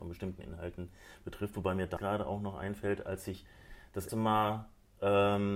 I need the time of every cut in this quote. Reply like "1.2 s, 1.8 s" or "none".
2.0 s, 4.1 s